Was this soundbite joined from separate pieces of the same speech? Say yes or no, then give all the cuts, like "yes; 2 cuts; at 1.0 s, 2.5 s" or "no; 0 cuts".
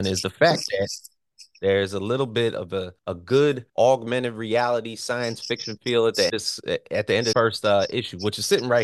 yes; 4 cuts; at 3.0 s, 3.7 s, 6.3 s, 7.3 s